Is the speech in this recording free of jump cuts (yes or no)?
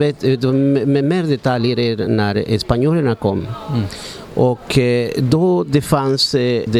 yes